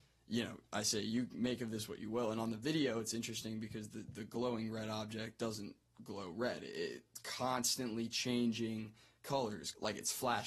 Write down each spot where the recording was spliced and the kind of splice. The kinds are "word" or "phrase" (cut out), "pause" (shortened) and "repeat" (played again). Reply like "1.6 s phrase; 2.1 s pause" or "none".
none